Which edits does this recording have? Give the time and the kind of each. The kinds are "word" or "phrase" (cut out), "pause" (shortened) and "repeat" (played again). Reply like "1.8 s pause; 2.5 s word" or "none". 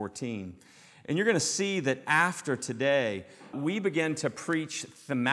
3.5 s word